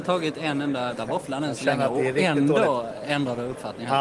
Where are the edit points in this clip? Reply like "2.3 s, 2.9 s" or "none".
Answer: 0.9 s